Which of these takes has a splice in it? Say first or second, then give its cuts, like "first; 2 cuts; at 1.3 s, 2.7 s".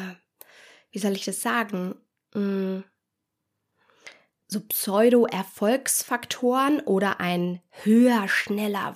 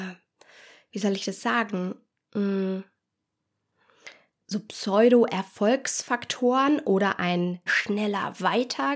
second; 1 cut; at 7.7 s